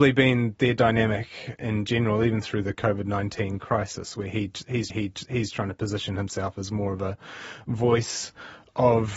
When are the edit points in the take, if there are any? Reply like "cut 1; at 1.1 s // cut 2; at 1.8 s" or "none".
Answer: cut 1; at 4.9 s